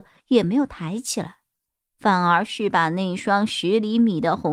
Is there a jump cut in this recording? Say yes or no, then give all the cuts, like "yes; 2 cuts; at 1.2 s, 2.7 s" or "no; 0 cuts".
no; 0 cuts